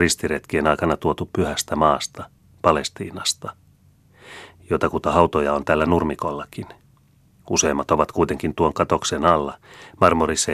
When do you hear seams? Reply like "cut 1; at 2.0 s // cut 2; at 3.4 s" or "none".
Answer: none